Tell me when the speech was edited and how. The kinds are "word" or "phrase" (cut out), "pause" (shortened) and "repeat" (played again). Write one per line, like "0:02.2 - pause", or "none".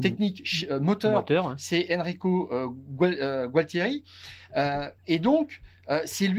0:05.0 - pause